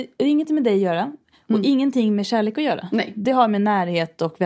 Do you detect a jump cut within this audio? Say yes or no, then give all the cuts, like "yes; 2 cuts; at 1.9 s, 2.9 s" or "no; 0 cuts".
no; 0 cuts